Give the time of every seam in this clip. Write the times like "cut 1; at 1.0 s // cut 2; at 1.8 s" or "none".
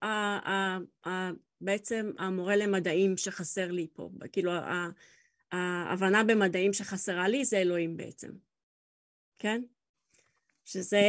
none